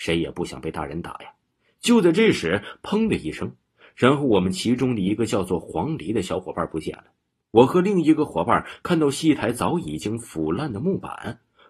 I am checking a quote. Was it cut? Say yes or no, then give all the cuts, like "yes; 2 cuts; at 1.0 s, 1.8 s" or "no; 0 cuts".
no; 0 cuts